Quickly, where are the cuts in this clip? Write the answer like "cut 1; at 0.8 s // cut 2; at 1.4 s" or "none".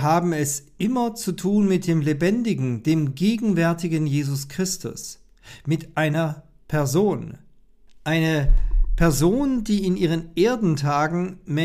none